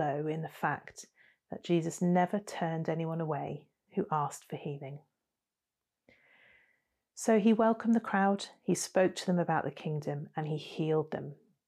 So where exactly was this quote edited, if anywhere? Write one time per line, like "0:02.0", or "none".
none